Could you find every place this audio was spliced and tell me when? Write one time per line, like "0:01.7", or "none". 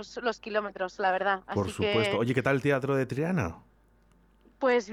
none